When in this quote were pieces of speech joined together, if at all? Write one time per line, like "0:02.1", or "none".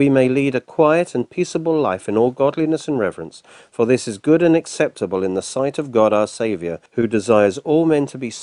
0:06.9